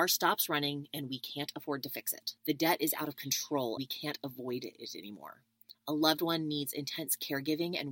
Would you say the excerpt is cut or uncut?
cut